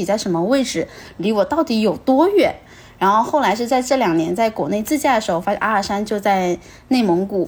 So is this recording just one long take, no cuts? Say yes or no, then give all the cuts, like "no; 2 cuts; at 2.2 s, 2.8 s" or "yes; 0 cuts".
no; 1 cut; at 5.6 s